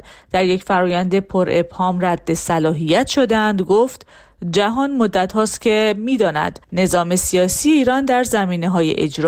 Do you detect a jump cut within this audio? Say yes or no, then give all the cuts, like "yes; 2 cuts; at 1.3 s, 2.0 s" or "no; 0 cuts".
yes; 1 cut; at 6.6 s